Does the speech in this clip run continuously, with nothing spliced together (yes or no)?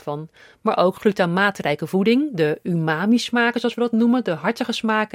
yes